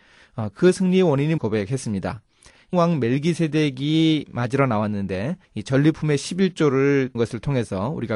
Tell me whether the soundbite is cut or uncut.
cut